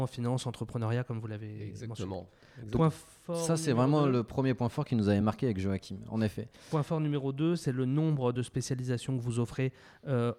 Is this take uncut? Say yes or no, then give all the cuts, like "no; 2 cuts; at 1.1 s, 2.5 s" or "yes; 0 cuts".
yes; 0 cuts